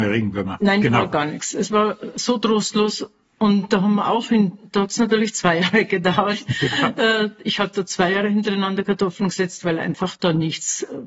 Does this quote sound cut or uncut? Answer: uncut